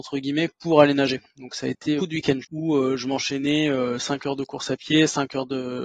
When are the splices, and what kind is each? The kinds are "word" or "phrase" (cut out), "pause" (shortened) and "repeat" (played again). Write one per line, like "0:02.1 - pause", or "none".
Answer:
0:02.0 - word
0:02.4 - phrase